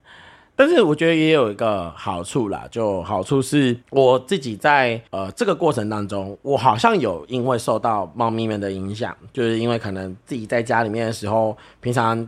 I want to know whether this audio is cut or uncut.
cut